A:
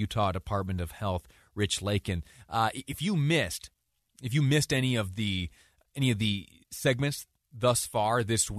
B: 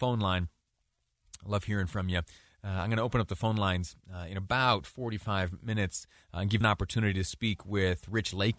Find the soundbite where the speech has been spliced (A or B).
B